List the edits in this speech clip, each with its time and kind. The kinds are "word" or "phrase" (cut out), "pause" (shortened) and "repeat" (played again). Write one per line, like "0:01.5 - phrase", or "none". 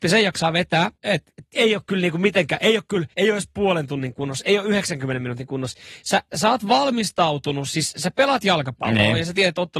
0:00.9 - pause
0:01.5 - word
0:03.1 - pause